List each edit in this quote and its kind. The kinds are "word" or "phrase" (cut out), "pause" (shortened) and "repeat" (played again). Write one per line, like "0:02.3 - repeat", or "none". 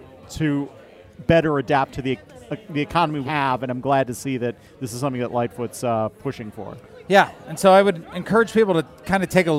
0:03.2 - word